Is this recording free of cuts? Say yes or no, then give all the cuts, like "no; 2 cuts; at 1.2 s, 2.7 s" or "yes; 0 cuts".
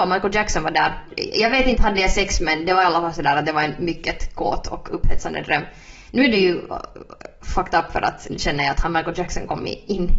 yes; 0 cuts